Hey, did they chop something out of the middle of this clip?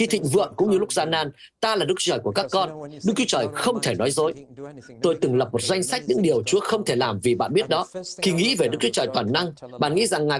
no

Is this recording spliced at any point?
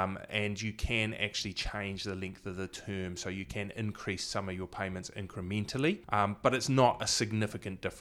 yes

